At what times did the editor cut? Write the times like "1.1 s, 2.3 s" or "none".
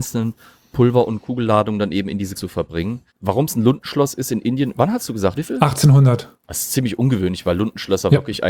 2.4 s, 3.1 s, 5.3 s, 6.4 s